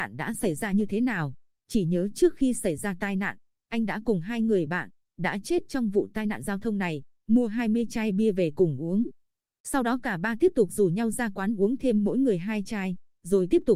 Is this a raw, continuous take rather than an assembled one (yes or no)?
yes